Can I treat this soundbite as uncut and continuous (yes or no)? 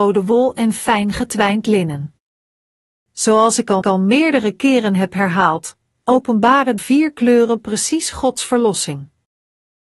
no